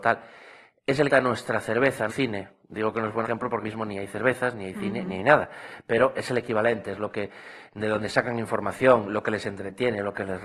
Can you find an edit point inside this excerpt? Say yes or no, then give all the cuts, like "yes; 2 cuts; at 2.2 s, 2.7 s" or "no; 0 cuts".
yes; 4 cuts; at 1.1 s, 2.1 s, 3.2 s, 3.6 s